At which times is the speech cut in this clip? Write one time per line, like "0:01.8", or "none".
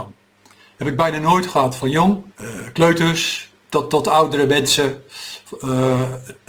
0:02.3